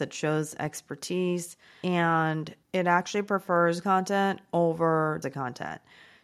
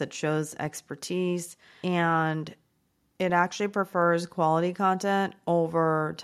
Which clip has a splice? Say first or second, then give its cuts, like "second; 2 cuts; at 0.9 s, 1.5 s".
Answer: first; 3 cuts; at 2.6 s, 3.8 s, 5.2 s